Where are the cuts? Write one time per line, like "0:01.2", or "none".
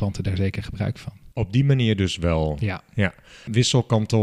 0:01.3